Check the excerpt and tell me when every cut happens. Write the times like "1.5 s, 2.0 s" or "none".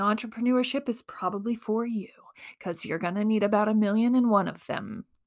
none